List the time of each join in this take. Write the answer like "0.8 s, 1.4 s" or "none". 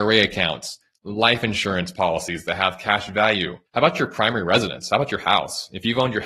3.7 s